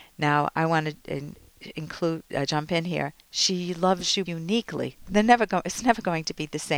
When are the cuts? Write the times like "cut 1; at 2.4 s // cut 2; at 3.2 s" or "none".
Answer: cut 1; at 2.5 s // cut 2; at 4.3 s

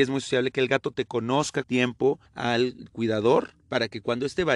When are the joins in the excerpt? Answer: cut 1; at 1.6 s // cut 2; at 2.3 s // cut 3; at 3.6 s

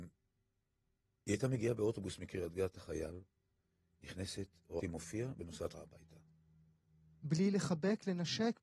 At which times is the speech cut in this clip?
cut 1; at 2.7 s // cut 2; at 4.8 s // cut 3; at 5.7 s

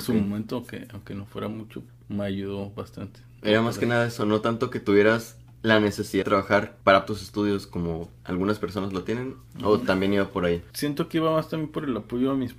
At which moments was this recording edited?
cut 1; at 1.9 s // cut 2; at 6.2 s // cut 3; at 7.1 s // cut 4; at 9.5 s

